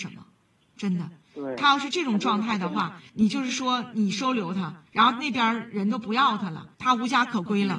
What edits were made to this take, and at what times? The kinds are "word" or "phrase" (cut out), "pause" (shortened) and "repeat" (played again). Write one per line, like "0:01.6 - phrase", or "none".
0:03.1 - pause
0:04.9 - pause
0:06.7 - pause